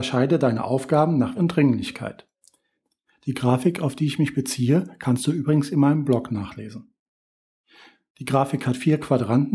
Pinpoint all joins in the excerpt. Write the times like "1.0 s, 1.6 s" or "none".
1.3 s